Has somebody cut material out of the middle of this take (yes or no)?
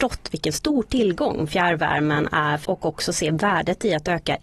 yes